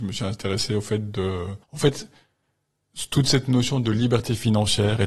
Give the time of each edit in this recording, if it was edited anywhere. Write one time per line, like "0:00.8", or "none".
0:01.6